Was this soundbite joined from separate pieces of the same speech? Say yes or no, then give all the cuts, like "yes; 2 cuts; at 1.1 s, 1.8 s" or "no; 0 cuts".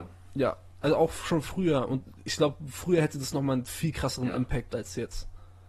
yes; 1 cut; at 4.7 s